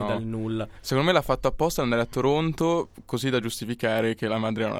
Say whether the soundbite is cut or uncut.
uncut